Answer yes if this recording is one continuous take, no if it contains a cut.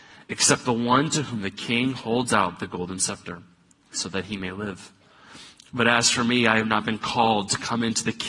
yes